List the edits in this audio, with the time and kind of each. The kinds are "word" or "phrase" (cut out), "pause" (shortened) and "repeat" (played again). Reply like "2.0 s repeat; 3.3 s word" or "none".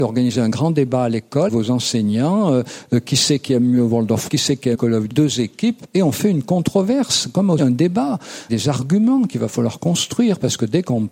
1.5 s word; 4.3 s word; 4.7 s word; 5.1 s word; 7.6 s word; 8.5 s word